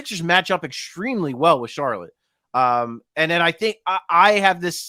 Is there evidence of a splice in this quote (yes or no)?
no